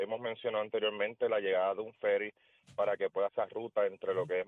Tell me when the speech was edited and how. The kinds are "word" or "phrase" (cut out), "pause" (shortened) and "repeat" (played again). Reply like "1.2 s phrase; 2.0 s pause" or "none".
3.3 s word